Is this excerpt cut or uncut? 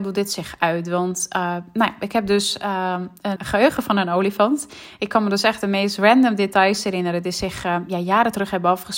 cut